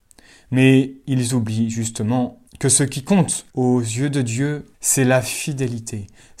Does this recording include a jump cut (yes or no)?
yes